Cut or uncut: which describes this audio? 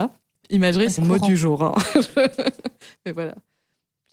cut